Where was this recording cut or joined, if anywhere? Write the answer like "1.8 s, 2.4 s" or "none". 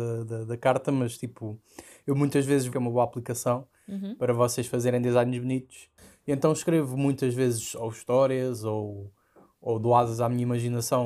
2.7 s